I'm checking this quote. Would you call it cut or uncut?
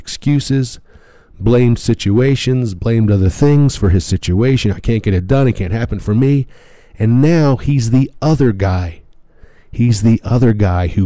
uncut